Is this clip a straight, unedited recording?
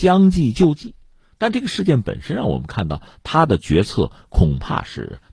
yes; 0 cuts

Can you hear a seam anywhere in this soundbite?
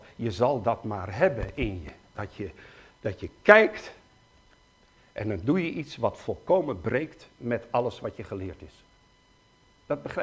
no; 0 cuts

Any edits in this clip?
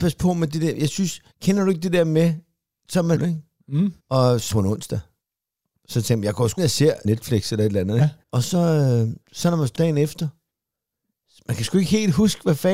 yes; 9 cuts; at 1.3 s, 3.2 s, 4.0 s, 4.5 s, 6.6 s, 7.0 s, 8.2 s, 9.2 s, 9.7 s

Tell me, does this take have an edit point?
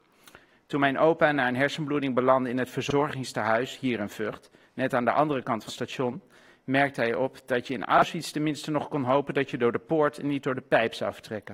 yes; 1 cut; at 5.7 s

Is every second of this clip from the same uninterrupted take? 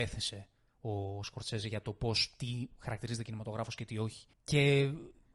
no; 1 cut; at 4.3 s

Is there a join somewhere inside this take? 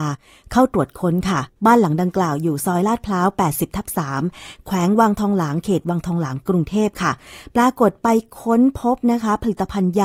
yes; 1 cut; at 1.5 s

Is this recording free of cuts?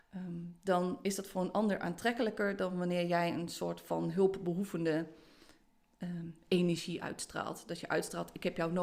yes; 0 cuts

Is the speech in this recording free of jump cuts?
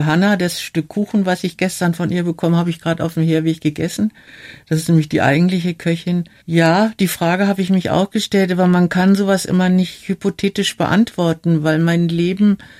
no; 1 cut; at 6.4 s

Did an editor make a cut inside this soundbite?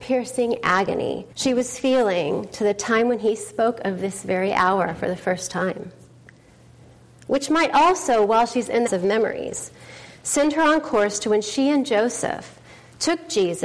yes; 2 cuts; at 1.3 s, 8.9 s

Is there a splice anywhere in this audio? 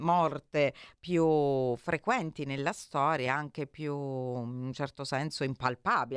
no; 0 cuts

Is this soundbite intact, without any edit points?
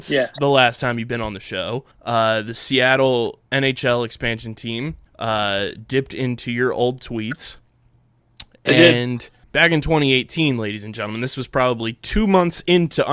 no; 4 cuts; at 1.9 s, 3.5 s, 5.1 s, 9.4 s

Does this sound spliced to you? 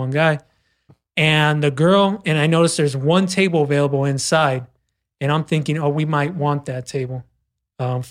no; 0 cuts

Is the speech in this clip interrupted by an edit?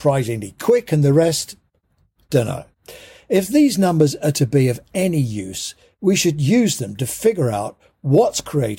no; 0 cuts

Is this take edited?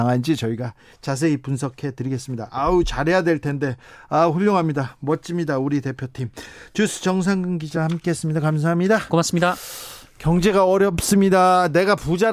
no; 0 cuts

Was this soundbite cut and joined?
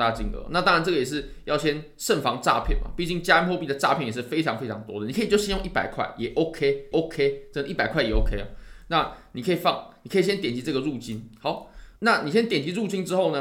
yes; 2 cuts; at 6.9 s, 12.0 s

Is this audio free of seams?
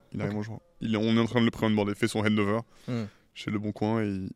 no; 1 cut; at 2.0 s

